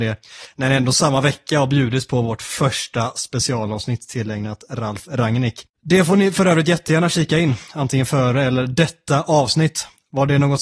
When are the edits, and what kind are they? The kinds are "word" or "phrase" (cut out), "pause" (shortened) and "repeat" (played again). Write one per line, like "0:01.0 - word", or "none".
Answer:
none